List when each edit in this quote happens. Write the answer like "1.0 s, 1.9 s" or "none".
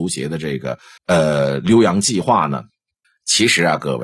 1.0 s, 3.0 s